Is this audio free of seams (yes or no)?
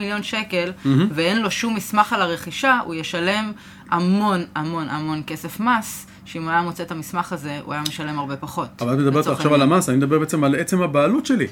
yes